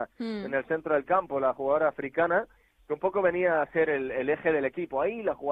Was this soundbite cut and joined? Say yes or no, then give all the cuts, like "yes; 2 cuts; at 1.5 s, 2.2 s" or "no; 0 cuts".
no; 0 cuts